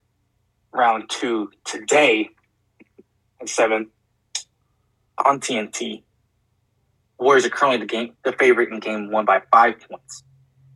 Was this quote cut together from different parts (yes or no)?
no